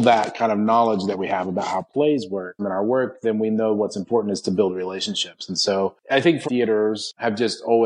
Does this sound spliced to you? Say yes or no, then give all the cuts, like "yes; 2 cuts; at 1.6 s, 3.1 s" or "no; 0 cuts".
yes; 3 cuts; at 2.6 s, 6.1 s, 6.4 s